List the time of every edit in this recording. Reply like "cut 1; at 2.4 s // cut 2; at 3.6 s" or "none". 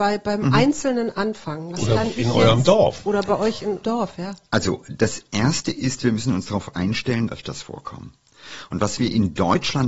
cut 1; at 3.8 s // cut 2; at 7.3 s